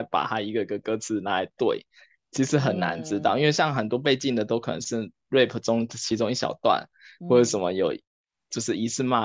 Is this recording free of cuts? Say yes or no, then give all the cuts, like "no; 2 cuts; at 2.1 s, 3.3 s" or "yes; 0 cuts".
yes; 0 cuts